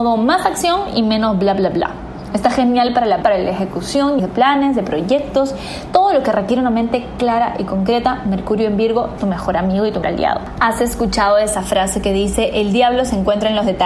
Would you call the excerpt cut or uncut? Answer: cut